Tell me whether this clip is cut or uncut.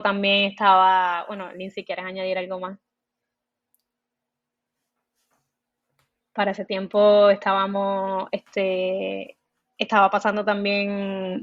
uncut